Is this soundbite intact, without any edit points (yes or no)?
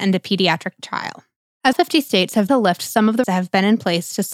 no